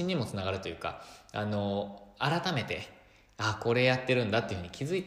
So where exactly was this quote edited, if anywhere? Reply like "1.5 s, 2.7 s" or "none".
none